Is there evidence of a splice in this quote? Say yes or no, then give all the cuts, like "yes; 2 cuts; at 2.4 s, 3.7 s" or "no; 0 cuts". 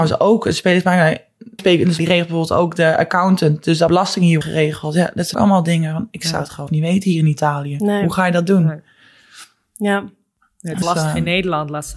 yes; 7 cuts; at 1.6 s, 2.0 s, 3.9 s, 4.4 s, 5.3 s, 6.7 s, 10.8 s